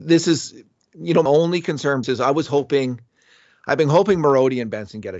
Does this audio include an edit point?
yes; 2 cuts; at 1.3 s, 2.0 s

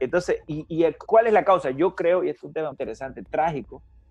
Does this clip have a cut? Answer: yes; 2 cuts; at 1.1 s, 2.7 s

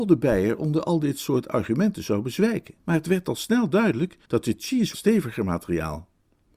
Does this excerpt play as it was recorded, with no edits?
no; 3 cuts; at 2.8 s, 4.2 s, 4.9 s

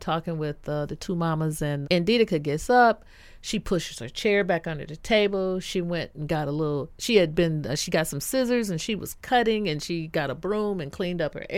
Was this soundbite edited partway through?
yes; 1 cut; at 1.8 s

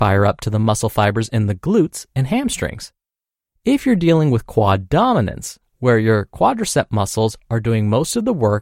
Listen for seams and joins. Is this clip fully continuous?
yes; 0 cuts

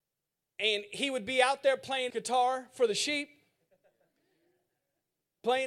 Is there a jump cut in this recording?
yes; 1 cut; at 2.1 s

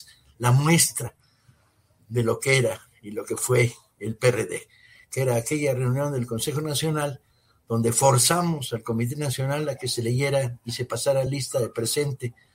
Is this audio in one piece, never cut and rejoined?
yes; 0 cuts

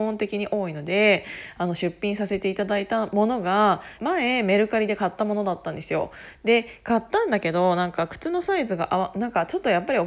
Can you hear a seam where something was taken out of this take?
yes; 1 cut; at 4.0 s

